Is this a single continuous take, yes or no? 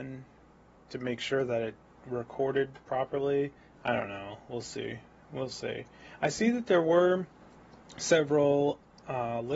yes